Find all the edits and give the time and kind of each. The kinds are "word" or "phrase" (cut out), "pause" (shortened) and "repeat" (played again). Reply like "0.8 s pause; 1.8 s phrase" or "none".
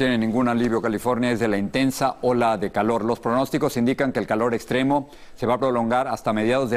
none